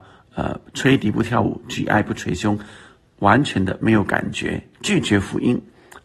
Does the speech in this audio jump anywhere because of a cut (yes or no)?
no